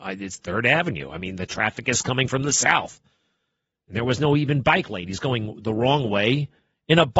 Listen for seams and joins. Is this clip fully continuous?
yes; 0 cuts

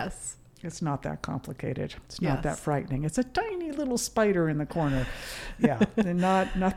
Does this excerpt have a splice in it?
no; 0 cuts

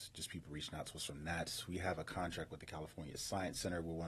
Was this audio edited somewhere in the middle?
no; 0 cuts

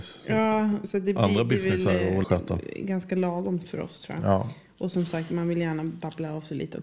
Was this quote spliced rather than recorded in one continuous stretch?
yes; 1 cut; at 2.2 s

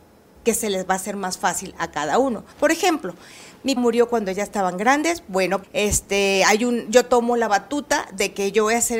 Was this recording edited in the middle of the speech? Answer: yes; 3 cuts; at 2.5 s, 3.8 s, 5.6 s

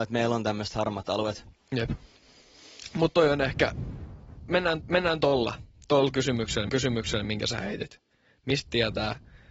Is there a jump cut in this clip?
yes; 2 cuts; at 4.8 s, 6.7 s

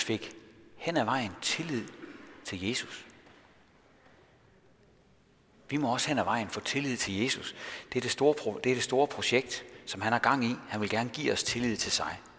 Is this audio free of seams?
yes; 0 cuts

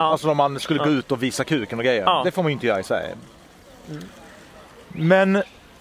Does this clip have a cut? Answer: no; 0 cuts

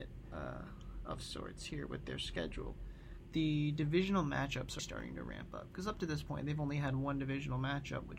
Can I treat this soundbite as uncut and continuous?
no; 1 cut; at 4.8 s

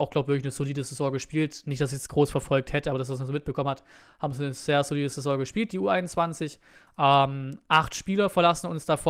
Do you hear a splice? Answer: no; 0 cuts

